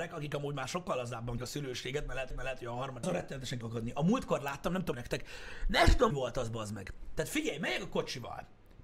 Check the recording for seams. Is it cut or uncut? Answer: cut